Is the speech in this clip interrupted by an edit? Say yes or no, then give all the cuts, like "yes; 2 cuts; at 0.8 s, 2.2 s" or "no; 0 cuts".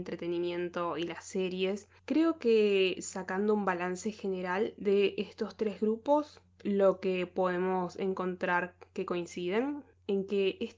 yes; 1 cut; at 2.0 s